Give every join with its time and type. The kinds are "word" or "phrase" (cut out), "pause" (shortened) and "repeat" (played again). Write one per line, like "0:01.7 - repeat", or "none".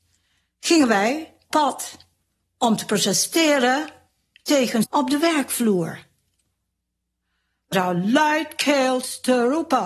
0:01.5 - word
0:04.8 - word
0:07.7 - word